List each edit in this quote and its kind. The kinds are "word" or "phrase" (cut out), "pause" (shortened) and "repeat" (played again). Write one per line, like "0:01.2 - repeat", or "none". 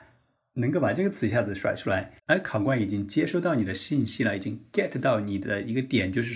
0:02.2 - pause